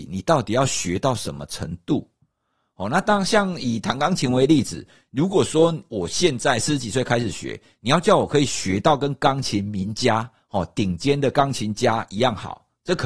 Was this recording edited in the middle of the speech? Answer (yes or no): no